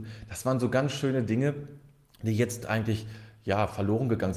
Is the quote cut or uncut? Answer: uncut